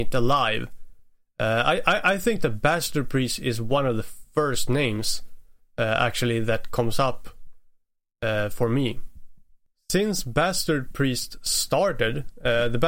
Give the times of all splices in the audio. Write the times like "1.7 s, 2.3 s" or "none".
none